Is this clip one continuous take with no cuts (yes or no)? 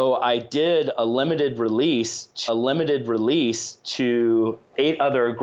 no